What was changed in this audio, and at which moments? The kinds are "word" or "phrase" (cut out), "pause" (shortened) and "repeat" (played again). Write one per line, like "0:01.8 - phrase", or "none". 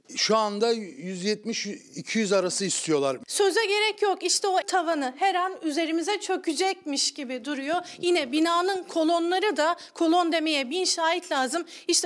0:04.6 - phrase